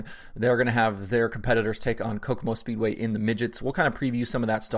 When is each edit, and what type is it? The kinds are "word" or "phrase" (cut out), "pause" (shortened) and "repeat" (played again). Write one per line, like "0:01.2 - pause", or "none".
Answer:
none